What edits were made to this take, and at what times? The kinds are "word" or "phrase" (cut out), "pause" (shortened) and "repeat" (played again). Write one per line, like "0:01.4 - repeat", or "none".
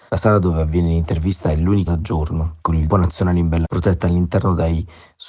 0:01.9 - word
0:02.9 - word
0:03.6 - word

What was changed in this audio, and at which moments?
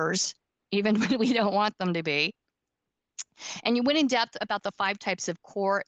none

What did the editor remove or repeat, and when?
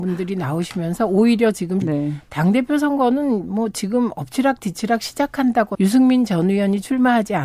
0:01.8 - word
0:05.7 - word

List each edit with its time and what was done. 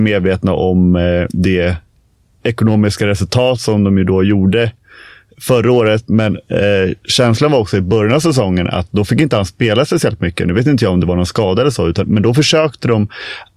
none

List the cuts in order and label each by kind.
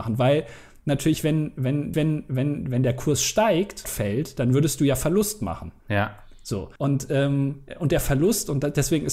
0:01.9 - repeat
0:03.8 - word
0:05.8 - pause
0:06.8 - pause

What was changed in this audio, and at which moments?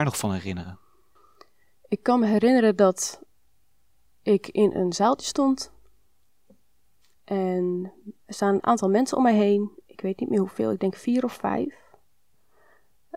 0:08.2 - word

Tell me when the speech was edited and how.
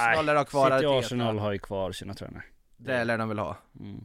none

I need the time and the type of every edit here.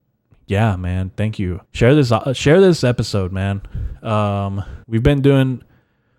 0:01.6 - pause
0:04.8 - pause

